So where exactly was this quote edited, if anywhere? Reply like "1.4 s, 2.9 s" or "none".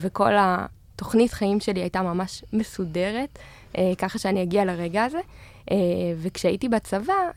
none